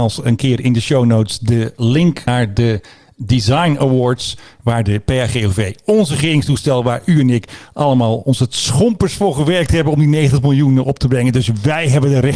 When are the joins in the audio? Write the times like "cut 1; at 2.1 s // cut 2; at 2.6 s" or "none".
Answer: cut 1; at 2.3 s